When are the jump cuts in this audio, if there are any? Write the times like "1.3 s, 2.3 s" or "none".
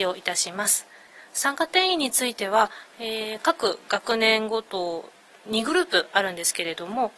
none